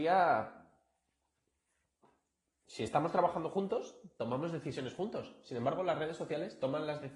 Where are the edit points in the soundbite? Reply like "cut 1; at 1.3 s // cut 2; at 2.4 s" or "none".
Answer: none